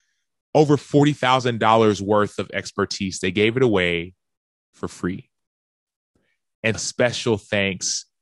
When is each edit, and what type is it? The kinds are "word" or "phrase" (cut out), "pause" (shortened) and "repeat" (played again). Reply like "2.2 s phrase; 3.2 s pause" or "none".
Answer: 6.7 s word